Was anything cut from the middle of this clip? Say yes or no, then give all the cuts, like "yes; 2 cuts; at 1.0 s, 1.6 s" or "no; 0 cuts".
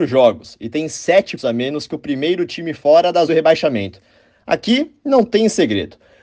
yes; 2 cuts; at 1.4 s, 3.3 s